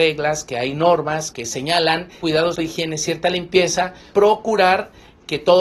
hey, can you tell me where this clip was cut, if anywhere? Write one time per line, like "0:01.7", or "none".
0:01.3
0:02.2
0:02.5
0:04.1